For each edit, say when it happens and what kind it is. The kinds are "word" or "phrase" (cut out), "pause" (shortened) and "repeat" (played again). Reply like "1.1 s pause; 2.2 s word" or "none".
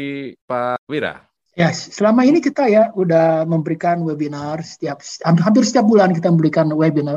none